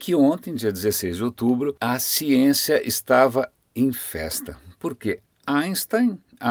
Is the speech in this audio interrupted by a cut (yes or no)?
yes